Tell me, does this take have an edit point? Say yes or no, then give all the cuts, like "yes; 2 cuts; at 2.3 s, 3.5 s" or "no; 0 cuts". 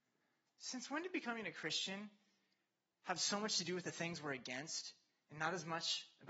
no; 0 cuts